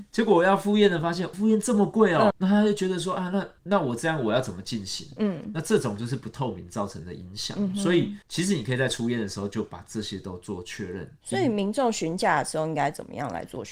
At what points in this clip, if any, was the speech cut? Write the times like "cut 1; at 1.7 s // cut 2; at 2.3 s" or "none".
cut 1; at 1.3 s // cut 2; at 2.3 s // cut 3; at 3.6 s // cut 4; at 8.2 s